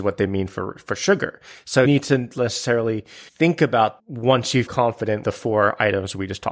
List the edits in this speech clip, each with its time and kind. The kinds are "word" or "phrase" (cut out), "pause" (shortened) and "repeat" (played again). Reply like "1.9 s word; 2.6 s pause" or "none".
1.8 s word; 3.3 s pause; 4.0 s word; 4.7 s word; 5.2 s word